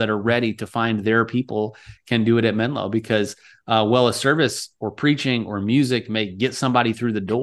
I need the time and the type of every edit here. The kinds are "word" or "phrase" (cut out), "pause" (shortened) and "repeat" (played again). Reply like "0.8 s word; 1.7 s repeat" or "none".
none